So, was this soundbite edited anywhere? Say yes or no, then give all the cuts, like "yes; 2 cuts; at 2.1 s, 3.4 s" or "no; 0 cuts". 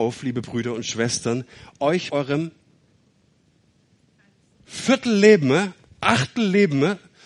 yes; 1 cut; at 2.1 s